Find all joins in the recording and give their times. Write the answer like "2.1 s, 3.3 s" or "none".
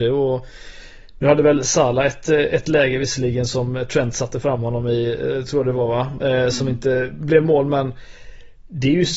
none